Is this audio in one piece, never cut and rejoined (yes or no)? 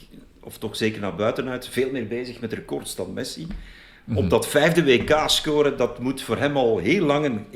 yes